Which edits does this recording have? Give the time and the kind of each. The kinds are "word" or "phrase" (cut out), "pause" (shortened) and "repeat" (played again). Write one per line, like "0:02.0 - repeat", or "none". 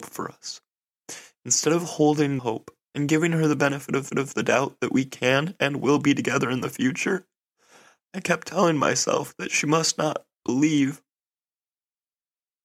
0:02.4 - word
0:02.8 - pause
0:04.1 - repeat